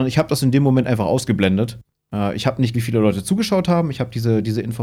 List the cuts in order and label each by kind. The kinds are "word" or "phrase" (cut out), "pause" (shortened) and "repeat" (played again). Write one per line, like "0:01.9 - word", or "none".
0:02.7 - word